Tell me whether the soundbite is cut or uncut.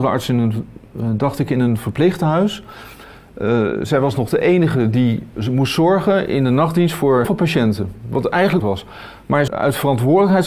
cut